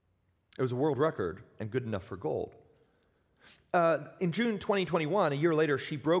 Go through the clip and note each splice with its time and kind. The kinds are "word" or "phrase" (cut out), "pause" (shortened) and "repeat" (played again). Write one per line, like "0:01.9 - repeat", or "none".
none